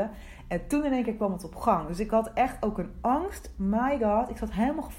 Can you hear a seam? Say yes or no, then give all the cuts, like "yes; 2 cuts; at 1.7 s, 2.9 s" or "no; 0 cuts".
no; 0 cuts